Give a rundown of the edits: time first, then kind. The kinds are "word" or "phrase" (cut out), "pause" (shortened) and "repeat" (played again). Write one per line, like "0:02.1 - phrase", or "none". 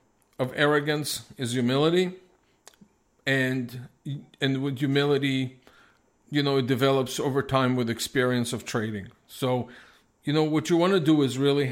none